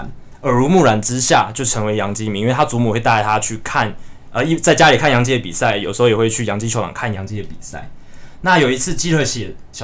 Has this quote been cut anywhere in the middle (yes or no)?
no